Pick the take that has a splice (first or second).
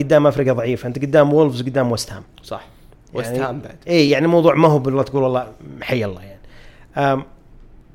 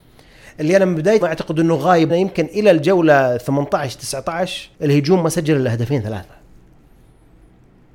second